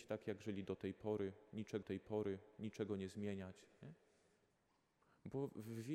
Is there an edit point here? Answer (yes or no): yes